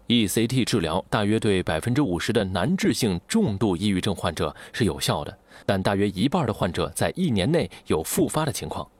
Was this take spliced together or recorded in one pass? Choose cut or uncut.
cut